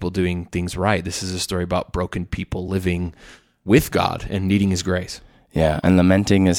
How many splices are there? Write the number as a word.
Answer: zero